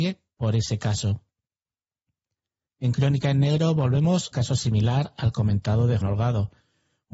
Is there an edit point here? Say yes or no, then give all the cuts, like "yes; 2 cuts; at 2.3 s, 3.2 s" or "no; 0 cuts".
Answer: yes; 2 cuts; at 4.3 s, 6.0 s